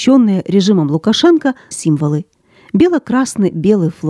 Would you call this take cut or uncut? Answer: cut